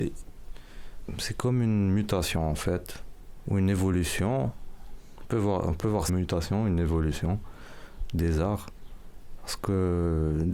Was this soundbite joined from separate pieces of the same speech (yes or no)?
yes